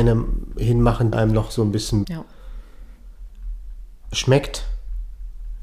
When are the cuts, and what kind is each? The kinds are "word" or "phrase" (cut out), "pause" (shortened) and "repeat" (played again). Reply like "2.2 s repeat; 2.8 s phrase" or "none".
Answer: 1.1 s word; 2.0 s word